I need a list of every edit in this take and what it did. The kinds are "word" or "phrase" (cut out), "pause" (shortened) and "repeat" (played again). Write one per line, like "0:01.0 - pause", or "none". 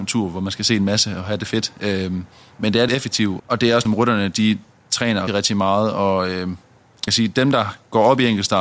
0:02.9 - word
0:03.4 - word
0:03.9 - word
0:05.3 - word
0:07.1 - word